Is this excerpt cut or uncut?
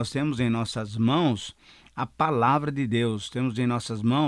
uncut